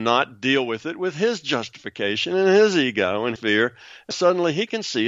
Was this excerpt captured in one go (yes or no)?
no